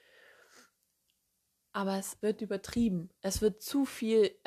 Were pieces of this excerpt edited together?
yes; 1 cut; at 2.2 s

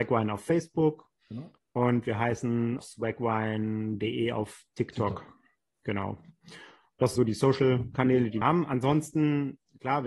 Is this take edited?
yes; 3 cuts; at 2.8 s, 7.2 s, 8.4 s

